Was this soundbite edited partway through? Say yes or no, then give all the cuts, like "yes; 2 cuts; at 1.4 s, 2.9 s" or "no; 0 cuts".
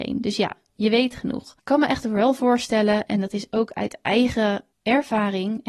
yes; 2 cuts; at 1.6 s, 4.7 s